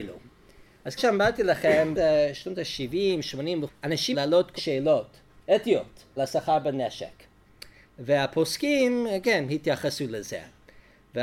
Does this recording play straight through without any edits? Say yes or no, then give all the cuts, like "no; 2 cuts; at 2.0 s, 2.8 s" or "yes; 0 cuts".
no; 7 cuts; at 1.0 s, 1.9 s, 3.7 s, 4.1 s, 4.6 s, 6.2 s, 9.2 s